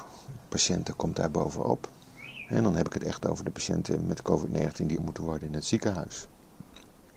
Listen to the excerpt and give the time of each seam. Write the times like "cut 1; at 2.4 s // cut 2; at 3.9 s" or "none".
cut 1; at 5.0 s